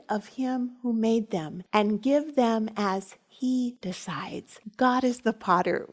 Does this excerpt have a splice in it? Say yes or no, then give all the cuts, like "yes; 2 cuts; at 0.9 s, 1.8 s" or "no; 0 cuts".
no; 0 cuts